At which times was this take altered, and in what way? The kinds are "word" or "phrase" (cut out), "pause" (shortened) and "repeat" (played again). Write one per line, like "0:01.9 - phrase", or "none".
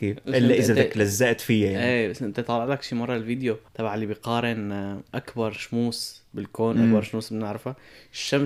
0:03.7 - pause